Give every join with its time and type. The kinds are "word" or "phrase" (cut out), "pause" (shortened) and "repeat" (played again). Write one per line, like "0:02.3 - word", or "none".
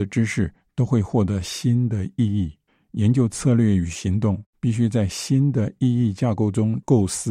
0:02.7 - pause
0:04.5 - pause